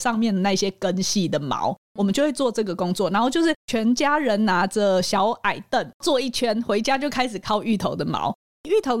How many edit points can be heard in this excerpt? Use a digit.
1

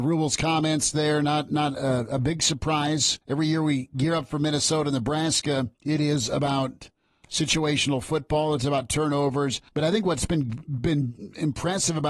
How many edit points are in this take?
3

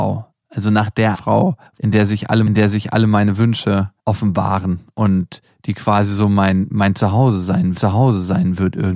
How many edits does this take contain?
5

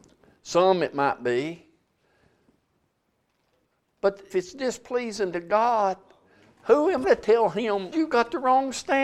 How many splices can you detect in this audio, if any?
3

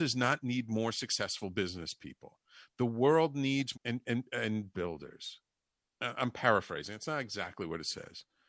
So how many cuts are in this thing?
3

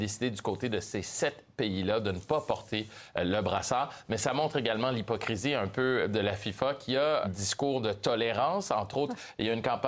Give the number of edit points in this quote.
1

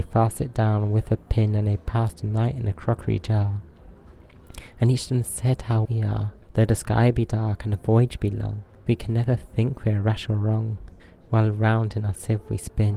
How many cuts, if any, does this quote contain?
4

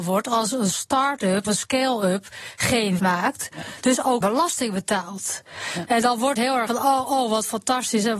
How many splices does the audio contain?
6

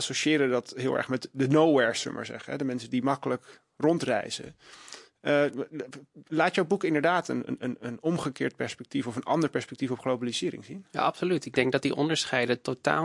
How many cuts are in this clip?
1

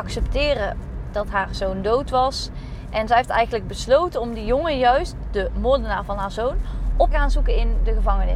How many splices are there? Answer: 2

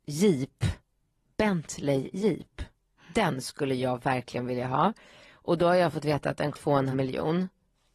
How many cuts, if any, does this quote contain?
2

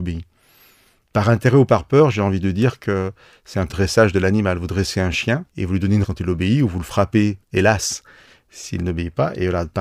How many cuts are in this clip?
4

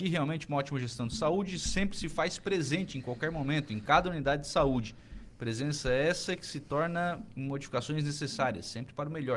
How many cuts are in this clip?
0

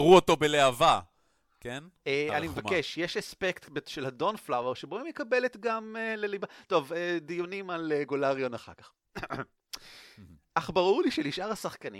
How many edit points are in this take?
0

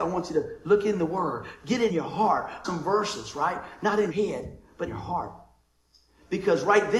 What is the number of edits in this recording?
4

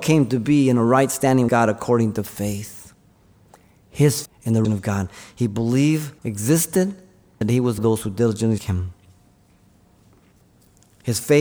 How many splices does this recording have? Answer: 7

